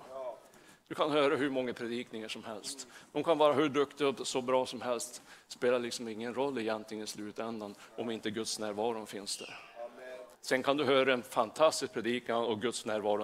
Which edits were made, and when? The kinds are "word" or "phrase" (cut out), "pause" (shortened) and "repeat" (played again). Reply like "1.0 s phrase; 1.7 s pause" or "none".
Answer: 10.3 s pause